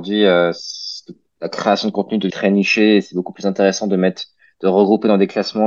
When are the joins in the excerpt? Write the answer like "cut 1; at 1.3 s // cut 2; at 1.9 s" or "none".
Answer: cut 1; at 2.3 s